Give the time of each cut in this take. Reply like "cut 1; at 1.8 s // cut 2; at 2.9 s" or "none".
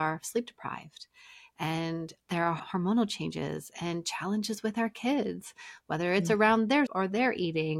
cut 1; at 2.2 s // cut 2; at 2.6 s // cut 3; at 6.9 s